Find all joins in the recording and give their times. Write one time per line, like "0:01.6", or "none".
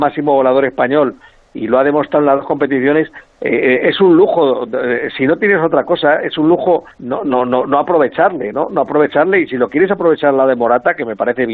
0:06.9